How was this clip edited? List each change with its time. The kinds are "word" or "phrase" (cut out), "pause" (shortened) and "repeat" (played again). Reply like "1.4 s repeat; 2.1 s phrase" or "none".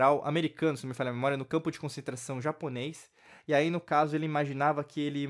none